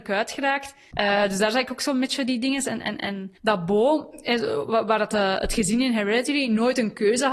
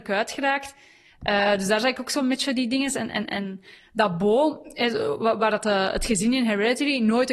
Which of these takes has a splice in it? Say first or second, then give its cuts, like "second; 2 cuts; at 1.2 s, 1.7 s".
first; 2 cuts; at 0.9 s, 3.4 s